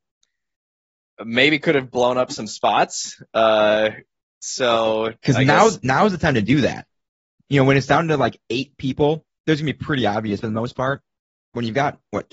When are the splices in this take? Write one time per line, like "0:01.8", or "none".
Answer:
0:03.3
0:05.2
0:10.4